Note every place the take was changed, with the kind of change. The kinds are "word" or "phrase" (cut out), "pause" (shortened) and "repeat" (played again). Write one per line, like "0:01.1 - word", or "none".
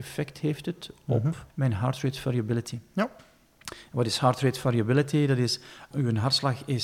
0:01.5 - pause
0:05.9 - word